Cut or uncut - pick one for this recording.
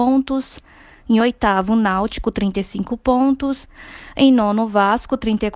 uncut